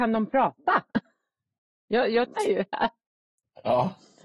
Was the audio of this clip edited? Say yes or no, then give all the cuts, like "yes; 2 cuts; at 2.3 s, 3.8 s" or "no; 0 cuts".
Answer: yes; 1 cut; at 2.4 s